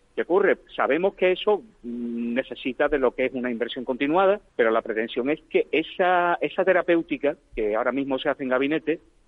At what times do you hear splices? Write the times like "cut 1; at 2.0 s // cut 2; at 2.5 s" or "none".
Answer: cut 1; at 4.5 s